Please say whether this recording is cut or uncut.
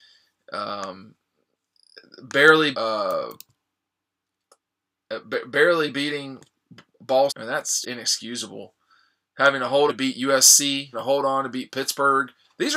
cut